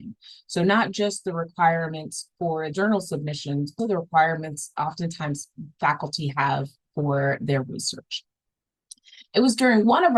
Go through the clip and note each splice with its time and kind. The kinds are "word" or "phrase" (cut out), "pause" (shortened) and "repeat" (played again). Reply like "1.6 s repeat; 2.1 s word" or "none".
2.7 s phrase; 3.8 s word